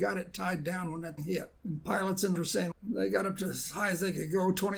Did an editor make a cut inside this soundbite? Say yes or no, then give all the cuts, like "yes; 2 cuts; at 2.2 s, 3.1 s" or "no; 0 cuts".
yes; 4 cuts; at 1.2 s, 1.6 s, 2.4 s, 2.7 s